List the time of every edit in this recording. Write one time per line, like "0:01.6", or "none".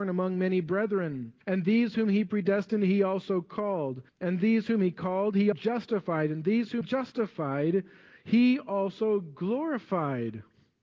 0:01.4
0:04.1
0:05.5
0:06.8